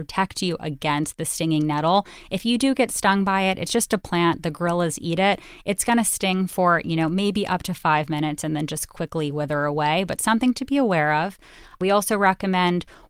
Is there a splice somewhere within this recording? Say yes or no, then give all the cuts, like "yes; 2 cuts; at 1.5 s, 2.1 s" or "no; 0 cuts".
no; 0 cuts